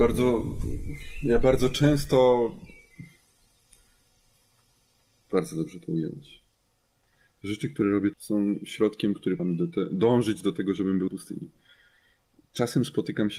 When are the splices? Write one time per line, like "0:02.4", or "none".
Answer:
0:08.1
0:09.4
0:11.1